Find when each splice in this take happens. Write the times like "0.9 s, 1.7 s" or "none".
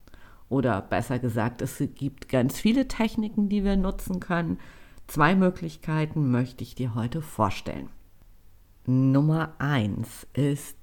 none